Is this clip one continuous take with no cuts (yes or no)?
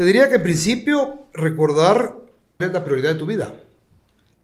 no